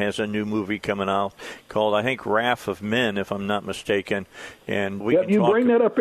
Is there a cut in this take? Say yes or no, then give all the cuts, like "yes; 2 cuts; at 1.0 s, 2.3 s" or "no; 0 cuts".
yes; 1 cut; at 5.0 s